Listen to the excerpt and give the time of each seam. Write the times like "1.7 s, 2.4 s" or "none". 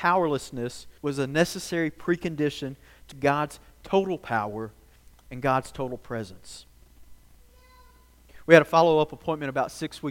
1.0 s, 3.1 s